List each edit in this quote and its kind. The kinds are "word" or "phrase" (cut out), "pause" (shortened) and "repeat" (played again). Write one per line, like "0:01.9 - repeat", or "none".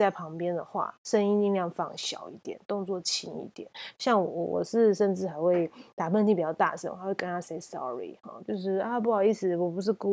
0:01.0 - pause